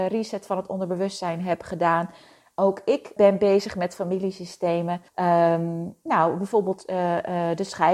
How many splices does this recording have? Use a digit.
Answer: 2